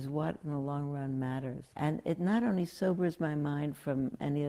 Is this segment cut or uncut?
cut